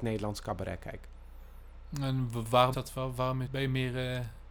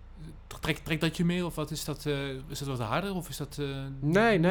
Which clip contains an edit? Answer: first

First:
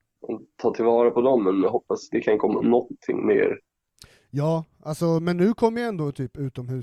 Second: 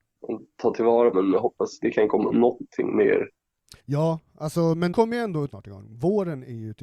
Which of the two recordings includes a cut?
second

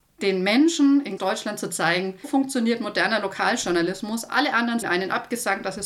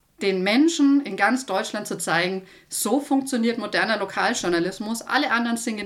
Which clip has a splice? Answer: first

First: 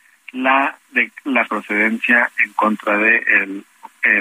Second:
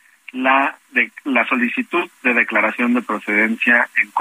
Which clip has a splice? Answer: first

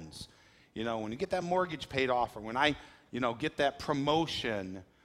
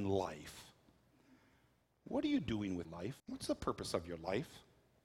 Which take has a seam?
second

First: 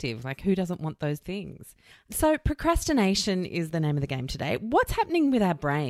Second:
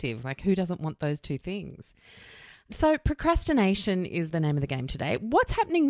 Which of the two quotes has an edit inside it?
first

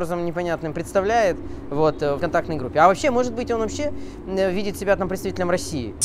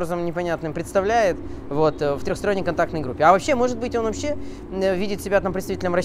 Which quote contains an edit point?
first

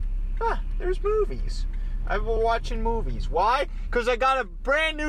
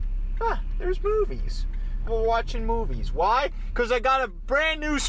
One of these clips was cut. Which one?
second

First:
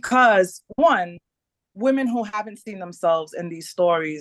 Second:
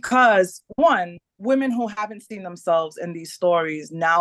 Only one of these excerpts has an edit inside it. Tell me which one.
second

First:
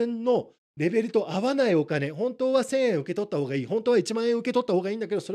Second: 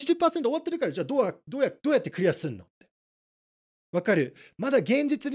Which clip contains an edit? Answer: second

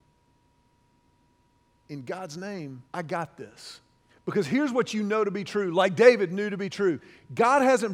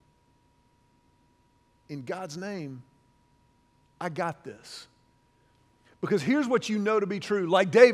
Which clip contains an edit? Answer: first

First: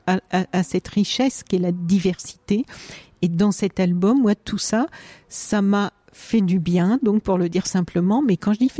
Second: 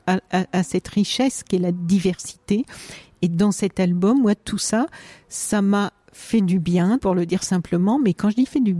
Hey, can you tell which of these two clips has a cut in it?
second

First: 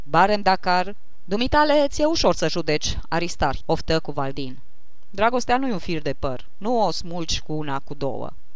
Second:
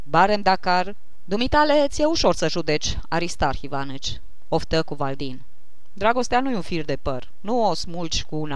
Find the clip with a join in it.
first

